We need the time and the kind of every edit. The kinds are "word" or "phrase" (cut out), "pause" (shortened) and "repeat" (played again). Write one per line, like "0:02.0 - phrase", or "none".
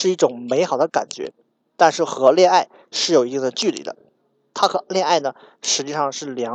none